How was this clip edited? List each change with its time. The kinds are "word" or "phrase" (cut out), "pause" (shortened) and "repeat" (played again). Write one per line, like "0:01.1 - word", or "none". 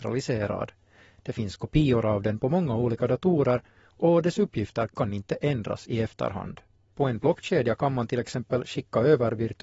none